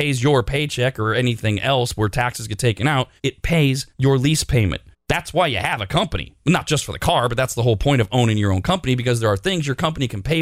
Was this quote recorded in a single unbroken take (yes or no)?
no